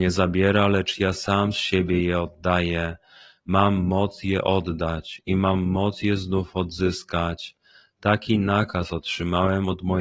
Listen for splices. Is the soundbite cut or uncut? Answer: uncut